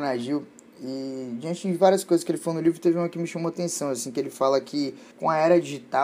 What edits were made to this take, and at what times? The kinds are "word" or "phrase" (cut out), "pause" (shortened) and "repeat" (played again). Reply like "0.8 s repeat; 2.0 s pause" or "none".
5.1 s pause